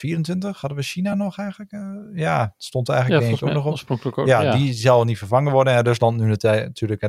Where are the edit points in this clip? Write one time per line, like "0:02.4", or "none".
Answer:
none